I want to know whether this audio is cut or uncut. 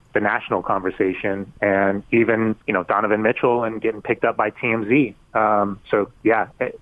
cut